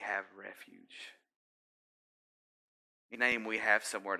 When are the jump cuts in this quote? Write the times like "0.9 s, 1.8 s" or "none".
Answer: 3.1 s